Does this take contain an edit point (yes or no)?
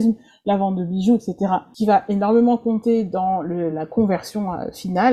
no